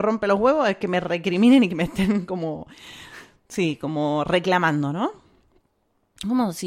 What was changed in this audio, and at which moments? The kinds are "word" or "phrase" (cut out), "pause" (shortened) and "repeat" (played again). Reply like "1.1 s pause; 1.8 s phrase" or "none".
none